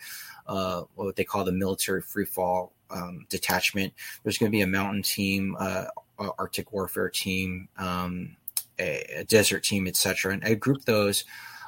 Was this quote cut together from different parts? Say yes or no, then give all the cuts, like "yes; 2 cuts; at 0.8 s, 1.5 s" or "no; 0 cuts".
no; 0 cuts